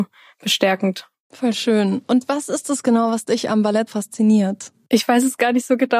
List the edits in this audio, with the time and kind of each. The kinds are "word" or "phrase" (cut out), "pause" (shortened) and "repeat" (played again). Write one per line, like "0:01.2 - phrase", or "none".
0:03.9 - word